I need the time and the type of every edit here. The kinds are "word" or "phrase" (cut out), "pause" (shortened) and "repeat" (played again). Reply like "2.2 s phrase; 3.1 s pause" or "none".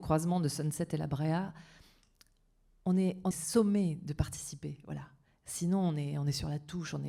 3.3 s word